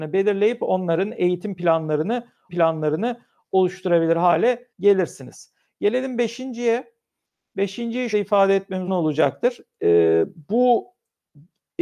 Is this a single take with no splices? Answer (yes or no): no